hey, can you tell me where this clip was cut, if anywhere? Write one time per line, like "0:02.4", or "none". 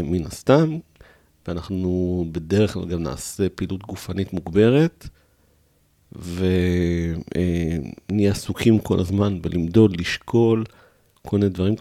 none